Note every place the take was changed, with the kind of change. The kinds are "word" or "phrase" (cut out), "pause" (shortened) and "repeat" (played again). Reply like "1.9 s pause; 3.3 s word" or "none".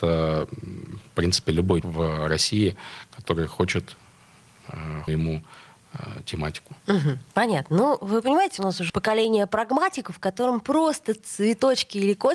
1.8 s word; 5.1 s phrase; 6.8 s pause; 8.6 s phrase; 8.9 s word